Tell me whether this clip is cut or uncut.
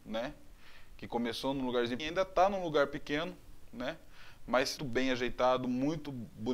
cut